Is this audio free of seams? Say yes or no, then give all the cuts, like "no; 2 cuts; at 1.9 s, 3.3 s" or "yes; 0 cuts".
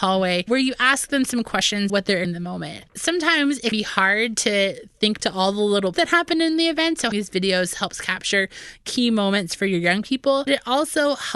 no; 7 cuts; at 1.9 s, 2.2 s, 3.7 s, 5.2 s, 5.9 s, 7.1 s, 10.5 s